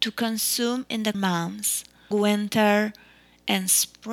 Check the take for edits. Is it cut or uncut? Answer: cut